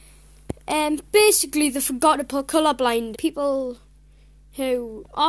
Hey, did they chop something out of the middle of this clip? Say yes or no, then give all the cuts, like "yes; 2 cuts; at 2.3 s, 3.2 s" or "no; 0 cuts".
yes; 1 cut; at 3.1 s